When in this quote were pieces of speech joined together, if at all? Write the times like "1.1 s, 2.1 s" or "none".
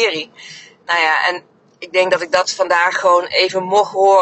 none